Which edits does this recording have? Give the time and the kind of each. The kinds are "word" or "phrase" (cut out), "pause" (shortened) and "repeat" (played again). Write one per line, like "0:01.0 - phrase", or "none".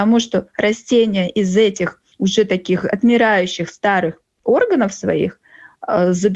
0:02.1 - pause